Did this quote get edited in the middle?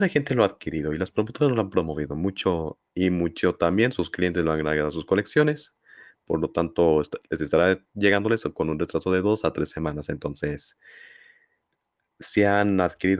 yes; 1 cut; at 2.9 s

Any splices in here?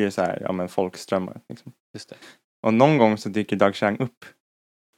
no; 0 cuts

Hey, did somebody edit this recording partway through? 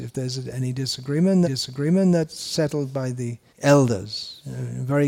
yes; 2 cuts; at 1.4 s, 3.5 s

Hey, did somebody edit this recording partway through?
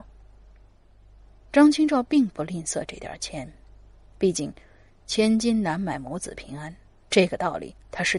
no; 0 cuts

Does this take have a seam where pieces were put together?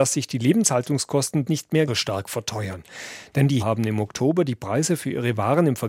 yes; 3 cuts; at 1.4 s, 1.9 s, 3.6 s

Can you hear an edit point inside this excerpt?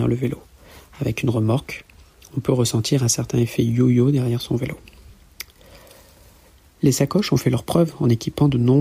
no; 0 cuts

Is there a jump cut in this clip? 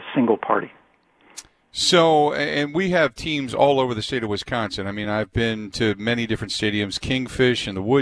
no; 0 cuts

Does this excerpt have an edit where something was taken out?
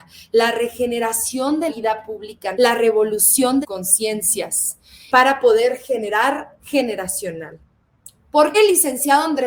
yes; 6 cuts; at 1.7 s, 2.5 s, 3.6 s, 5.1 s, 6.6 s, 8.5 s

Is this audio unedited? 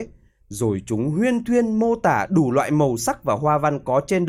yes; 0 cuts

